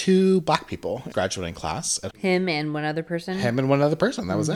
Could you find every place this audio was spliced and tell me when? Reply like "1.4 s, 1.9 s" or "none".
1.1 s, 2.1 s